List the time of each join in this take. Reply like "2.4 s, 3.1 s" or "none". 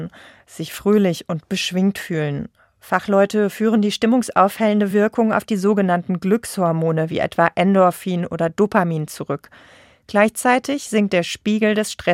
none